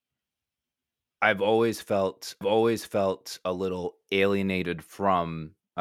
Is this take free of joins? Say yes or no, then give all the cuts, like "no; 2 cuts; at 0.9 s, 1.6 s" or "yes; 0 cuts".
no; 1 cut; at 2.4 s